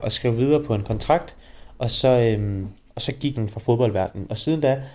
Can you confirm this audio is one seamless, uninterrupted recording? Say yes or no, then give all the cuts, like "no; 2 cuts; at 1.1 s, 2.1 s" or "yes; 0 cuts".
no; 2 cuts; at 2.8 s, 3.3 s